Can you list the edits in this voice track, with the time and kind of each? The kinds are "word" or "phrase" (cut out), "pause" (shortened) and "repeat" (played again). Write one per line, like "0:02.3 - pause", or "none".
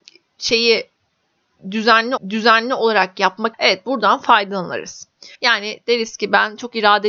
0:02.2 - repeat
0:03.5 - word
0:05.3 - pause